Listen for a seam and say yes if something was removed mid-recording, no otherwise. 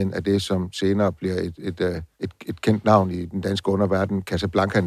yes